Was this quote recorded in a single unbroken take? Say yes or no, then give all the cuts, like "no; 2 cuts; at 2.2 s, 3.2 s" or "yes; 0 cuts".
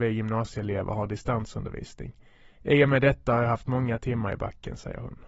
yes; 0 cuts